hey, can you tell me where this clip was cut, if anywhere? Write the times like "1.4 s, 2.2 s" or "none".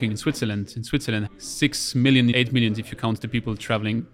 1.3 s, 2.3 s